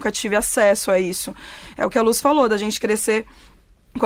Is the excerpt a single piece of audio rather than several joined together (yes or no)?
yes